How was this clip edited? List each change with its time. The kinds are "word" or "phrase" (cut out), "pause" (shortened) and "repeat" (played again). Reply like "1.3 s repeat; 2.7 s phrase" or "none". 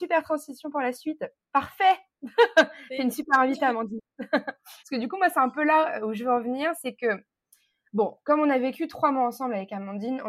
4.8 s pause